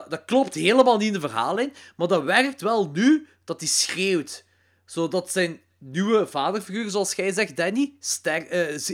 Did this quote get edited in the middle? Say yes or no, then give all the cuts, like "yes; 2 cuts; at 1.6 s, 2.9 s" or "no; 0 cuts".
no; 0 cuts